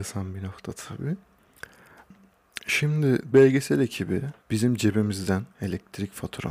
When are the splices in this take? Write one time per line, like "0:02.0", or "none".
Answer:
0:03.3
0:04.4
0:05.5